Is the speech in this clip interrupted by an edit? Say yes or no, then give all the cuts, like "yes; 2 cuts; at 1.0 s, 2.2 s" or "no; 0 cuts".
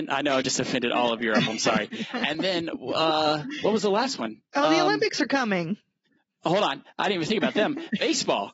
no; 0 cuts